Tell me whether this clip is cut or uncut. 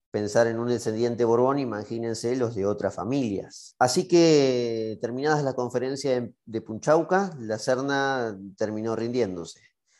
uncut